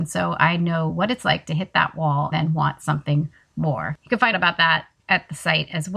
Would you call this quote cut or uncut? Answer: cut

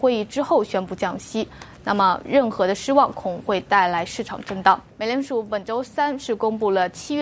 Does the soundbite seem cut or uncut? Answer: cut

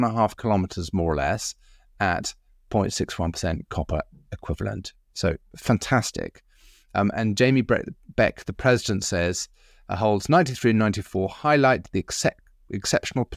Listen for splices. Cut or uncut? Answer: uncut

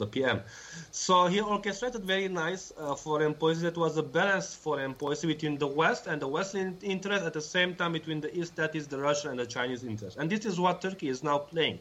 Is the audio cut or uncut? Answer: uncut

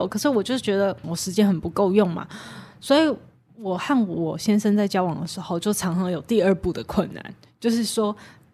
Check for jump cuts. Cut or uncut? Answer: cut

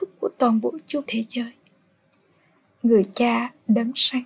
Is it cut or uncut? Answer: cut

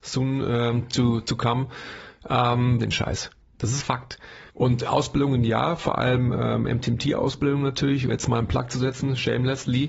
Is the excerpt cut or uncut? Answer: cut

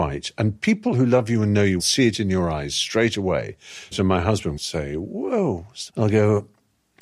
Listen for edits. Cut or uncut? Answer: cut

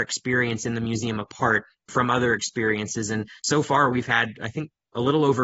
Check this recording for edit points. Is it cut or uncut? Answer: cut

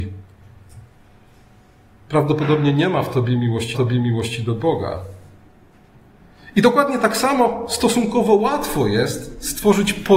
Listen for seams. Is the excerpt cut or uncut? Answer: cut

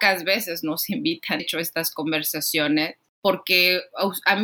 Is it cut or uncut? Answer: cut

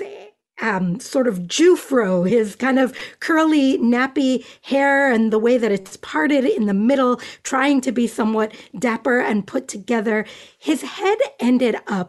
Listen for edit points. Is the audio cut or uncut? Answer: uncut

